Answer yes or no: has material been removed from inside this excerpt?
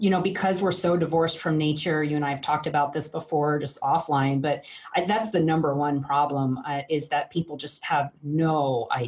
no